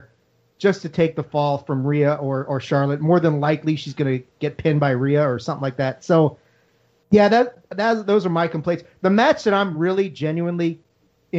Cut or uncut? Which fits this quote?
uncut